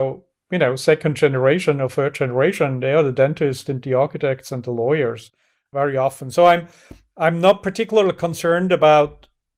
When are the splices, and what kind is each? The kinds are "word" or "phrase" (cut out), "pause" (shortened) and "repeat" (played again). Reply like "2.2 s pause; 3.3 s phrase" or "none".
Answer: none